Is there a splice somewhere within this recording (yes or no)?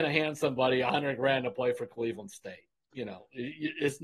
no